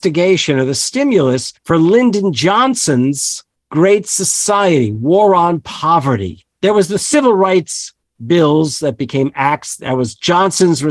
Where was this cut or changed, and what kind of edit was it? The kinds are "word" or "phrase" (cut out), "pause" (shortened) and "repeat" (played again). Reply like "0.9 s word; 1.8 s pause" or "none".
none

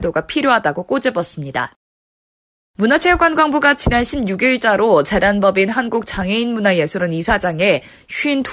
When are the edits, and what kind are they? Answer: none

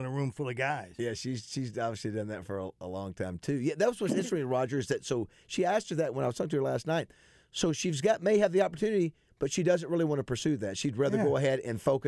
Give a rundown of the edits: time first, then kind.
none

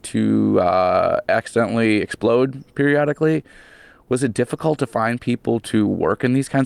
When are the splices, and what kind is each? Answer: none

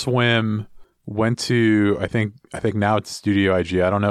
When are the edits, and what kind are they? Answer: none

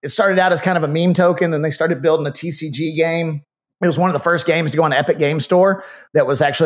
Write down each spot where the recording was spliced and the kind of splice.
3.7 s pause

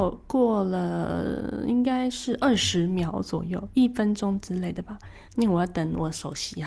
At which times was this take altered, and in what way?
5.3 s pause

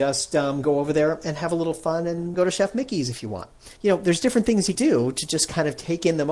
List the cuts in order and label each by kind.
2.3 s word; 3.8 s pause; 4.7 s word

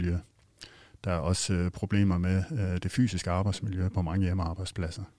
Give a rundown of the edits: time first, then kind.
3.9 s word

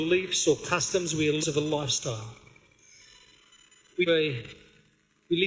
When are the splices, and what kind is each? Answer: 1.4 s word; 4.1 s phrase

